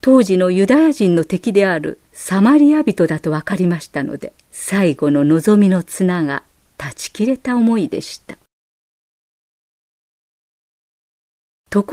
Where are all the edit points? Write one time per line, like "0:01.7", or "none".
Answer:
0:02.1
0:04.4